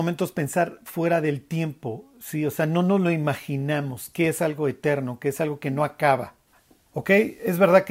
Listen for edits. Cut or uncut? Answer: cut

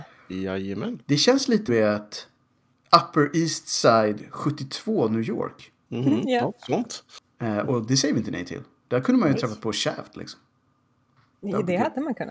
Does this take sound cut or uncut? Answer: cut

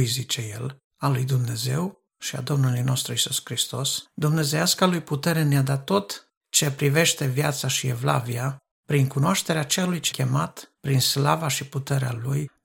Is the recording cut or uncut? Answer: cut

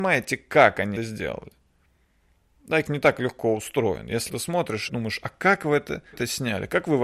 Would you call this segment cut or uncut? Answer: cut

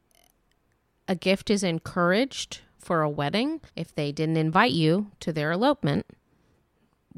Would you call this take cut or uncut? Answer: cut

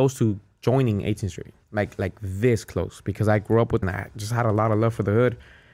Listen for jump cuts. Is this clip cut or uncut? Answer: cut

